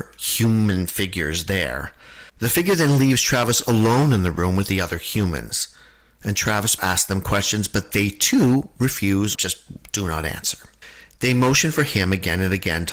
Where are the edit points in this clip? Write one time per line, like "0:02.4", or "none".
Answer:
0:02.3
0:06.8
0:09.4

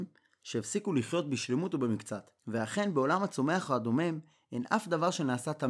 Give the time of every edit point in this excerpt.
0:02.4

